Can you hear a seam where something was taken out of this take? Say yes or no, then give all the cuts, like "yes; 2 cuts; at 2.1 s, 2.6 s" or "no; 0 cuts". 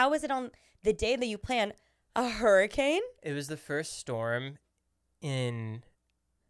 no; 0 cuts